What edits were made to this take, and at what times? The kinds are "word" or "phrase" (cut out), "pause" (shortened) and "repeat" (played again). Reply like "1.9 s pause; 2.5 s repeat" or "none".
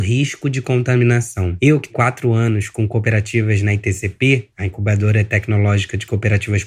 1.9 s word